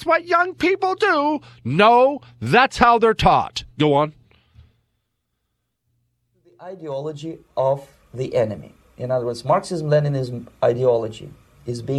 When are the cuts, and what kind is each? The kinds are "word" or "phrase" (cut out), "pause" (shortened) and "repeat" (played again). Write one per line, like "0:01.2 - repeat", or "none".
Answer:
none

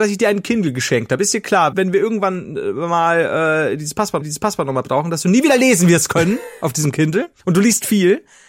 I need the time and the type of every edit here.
0:01.7 - word
0:04.2 - repeat
0:07.4 - pause

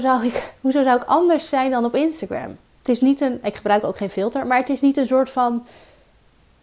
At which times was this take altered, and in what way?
0:02.6 - pause

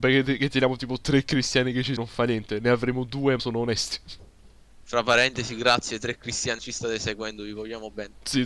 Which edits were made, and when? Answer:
0:02.0 - word
0:03.4 - word
0:06.6 - word

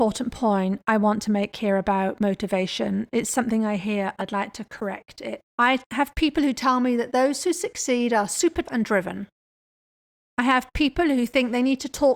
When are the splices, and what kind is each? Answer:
0:04.2 - phrase
0:05.5 - pause
0:08.7 - word

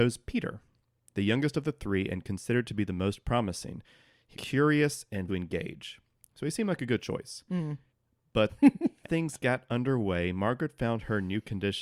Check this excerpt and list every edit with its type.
0:04.3 - word
0:05.3 - phrase
0:07.9 - pause
0:09.0 - word

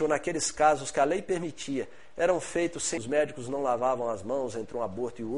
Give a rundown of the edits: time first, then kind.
0:03.0 - word

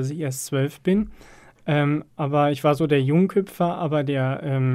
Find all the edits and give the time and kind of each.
none

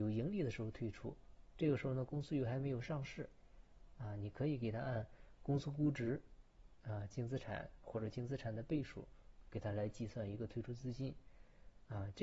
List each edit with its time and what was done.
none

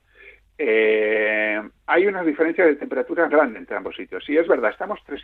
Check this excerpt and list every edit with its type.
0:01.8 - pause
0:03.3 - word

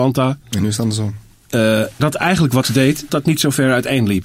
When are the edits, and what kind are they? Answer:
0:02.0 - word
0:02.6 - word
0:03.1 - word

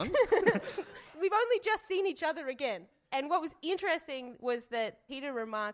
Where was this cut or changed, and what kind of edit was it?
none

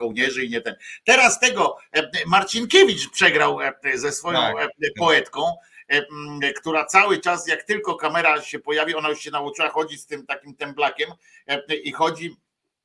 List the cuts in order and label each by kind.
none

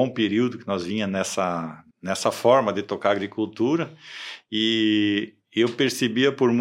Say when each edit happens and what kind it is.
0:01.9 - pause

